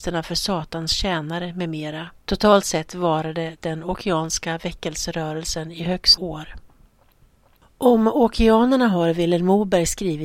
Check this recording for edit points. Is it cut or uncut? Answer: cut